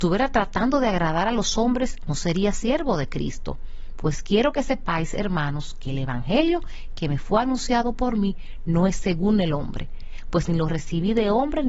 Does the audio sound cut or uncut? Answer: uncut